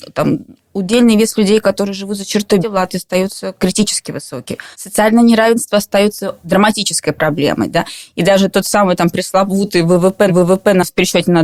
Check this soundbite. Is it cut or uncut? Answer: cut